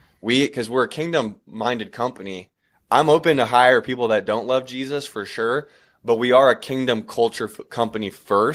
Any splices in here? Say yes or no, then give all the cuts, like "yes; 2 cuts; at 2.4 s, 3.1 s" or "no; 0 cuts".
no; 0 cuts